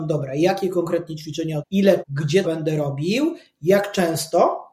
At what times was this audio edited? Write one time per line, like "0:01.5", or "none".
0:01.6
0:02.0
0:02.4